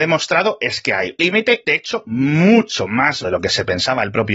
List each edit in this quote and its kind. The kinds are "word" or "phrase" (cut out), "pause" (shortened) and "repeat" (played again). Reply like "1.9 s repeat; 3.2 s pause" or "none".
1.2 s word; 1.6 s word; 3.2 s word